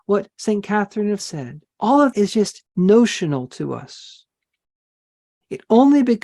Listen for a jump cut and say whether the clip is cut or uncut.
cut